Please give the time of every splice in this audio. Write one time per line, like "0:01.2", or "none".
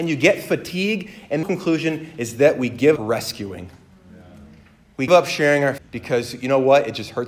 0:01.4
0:03.0
0:05.1
0:05.8